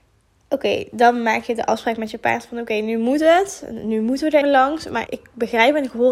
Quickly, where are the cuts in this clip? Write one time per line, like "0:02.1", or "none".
0:04.4
0:05.1